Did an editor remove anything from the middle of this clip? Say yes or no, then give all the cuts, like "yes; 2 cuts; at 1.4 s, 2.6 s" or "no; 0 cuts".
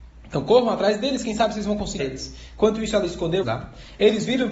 yes; 2 cuts; at 2.0 s, 3.4 s